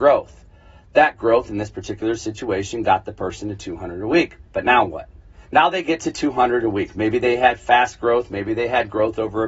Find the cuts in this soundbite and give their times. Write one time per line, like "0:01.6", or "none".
0:04.5
0:05.4